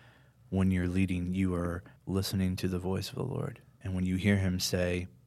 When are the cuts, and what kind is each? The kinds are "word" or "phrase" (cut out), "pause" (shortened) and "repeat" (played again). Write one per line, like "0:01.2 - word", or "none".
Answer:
0:02.0 - pause